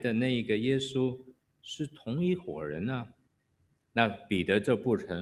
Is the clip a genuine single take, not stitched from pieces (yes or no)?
no